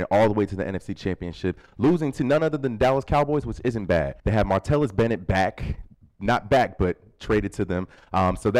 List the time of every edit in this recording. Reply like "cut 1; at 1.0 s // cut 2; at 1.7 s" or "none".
cut 1; at 4.2 s